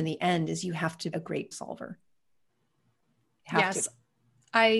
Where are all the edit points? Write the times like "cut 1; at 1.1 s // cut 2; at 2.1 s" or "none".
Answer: cut 1; at 1.1 s // cut 2; at 1.5 s